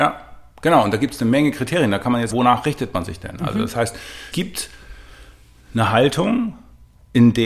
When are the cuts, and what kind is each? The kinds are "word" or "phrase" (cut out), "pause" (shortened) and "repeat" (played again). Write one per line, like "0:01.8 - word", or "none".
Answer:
0:02.3 - word
0:04.3 - word

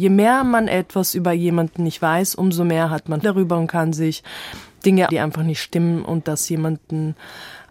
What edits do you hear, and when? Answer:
0:03.2 - word
0:05.1 - word

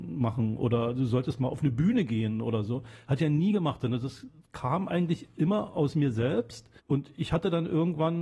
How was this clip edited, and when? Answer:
0:06.8 - pause

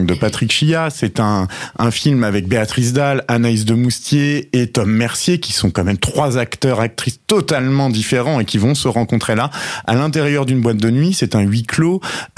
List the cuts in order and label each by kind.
none

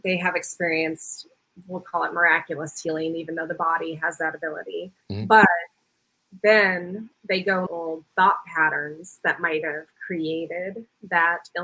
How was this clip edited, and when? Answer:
0:05.0 - pause
0:07.7 - phrase

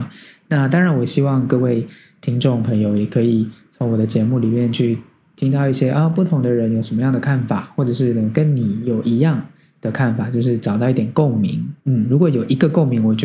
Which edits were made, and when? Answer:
0:11.8 - pause

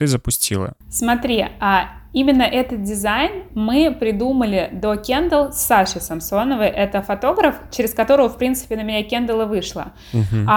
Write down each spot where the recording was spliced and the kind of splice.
none

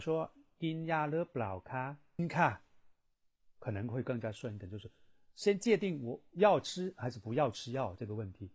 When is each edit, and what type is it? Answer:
0:02.2 - word
0:03.4 - word

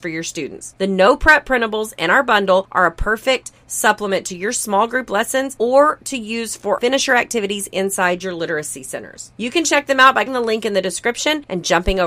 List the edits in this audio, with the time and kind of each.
0:06.8 - word
0:10.3 - word

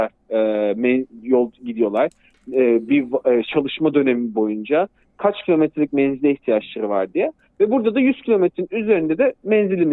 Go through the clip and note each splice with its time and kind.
0:03.4 - word

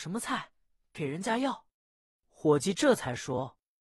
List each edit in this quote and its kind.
0:01.7 - pause

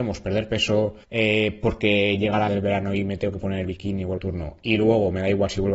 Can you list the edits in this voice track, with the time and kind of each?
0:01.0 - pause
0:02.5 - word
0:04.2 - phrase

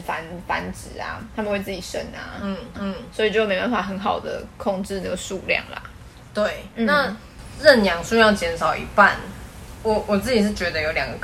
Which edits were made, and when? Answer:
0:02.7 - repeat
0:06.7 - pause

